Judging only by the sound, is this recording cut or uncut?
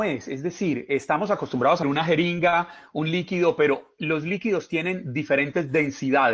cut